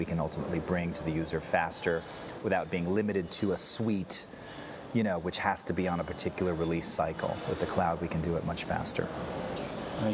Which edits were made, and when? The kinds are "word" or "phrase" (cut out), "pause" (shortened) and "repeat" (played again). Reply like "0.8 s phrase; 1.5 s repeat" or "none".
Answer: none